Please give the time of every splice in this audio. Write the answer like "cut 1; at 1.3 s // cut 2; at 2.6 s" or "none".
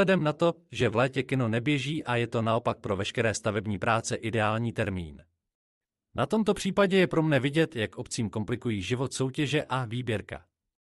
none